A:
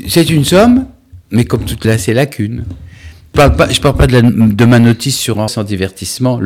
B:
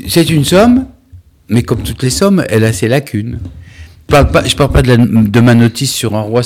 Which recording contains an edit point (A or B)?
A